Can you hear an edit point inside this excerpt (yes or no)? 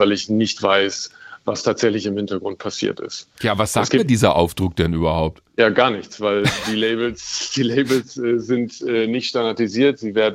yes